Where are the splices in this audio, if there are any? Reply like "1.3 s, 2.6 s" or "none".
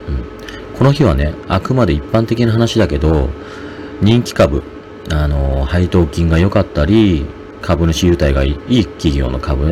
7.6 s

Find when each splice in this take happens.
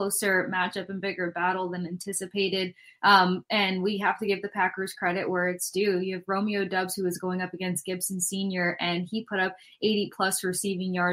none

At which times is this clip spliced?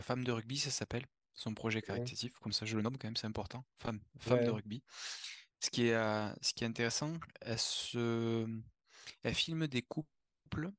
none

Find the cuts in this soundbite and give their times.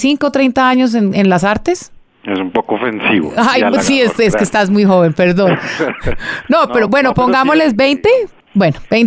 none

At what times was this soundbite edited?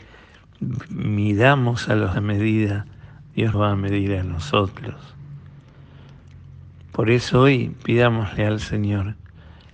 2.1 s, 3.5 s

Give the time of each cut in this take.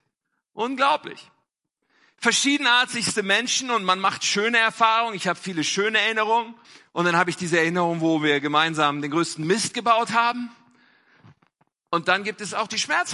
6.6 s

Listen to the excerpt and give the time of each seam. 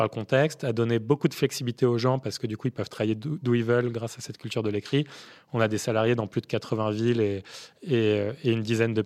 none

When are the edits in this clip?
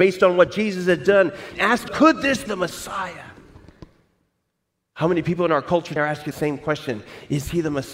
1.5 s, 1.9 s, 2.5 s, 6.0 s, 6.3 s

